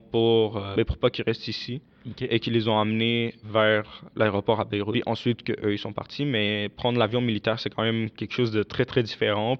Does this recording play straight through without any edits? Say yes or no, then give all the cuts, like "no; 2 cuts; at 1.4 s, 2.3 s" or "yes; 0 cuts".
no; 1 cut; at 3.4 s